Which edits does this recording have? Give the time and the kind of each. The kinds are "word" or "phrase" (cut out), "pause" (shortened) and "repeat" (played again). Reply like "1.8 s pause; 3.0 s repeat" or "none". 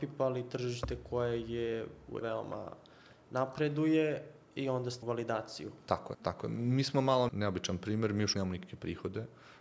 2.2 s phrase; 4.4 s pause; 5.0 s phrase; 6.1 s word; 7.3 s word; 8.3 s word

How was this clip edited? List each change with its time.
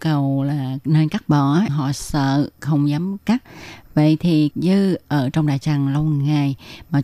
1.7 s word; 4.5 s phrase

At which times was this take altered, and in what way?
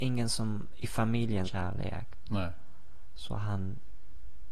1.4 s phrase

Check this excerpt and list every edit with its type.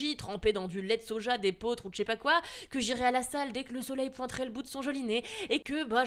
none

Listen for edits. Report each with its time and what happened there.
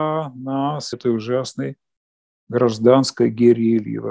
0.9 s phrase

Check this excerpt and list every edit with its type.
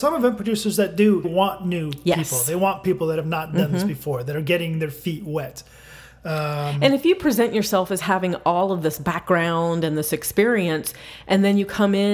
1.2 s word

